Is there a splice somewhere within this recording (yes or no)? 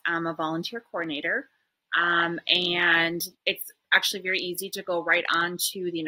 yes